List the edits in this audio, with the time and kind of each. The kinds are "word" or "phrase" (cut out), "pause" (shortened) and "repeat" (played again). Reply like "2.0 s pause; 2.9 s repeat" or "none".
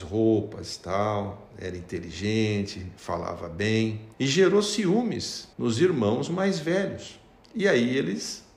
4.1 s pause; 5.5 s pause; 7.4 s pause